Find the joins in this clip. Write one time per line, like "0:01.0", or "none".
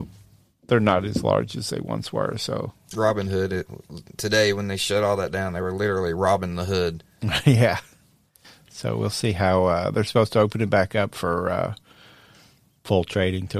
none